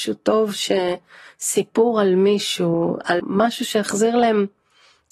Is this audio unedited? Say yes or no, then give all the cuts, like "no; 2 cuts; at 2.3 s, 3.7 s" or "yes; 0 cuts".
no; 1 cut; at 3.2 s